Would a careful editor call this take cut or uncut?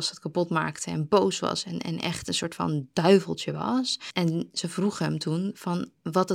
uncut